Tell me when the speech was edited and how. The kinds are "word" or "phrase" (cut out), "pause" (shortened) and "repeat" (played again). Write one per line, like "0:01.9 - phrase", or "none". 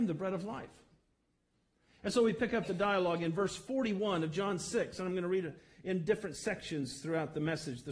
none